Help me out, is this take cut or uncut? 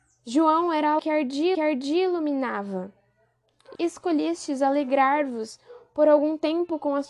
cut